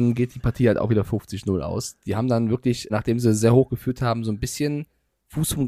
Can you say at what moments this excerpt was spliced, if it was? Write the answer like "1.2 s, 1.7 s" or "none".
2.9 s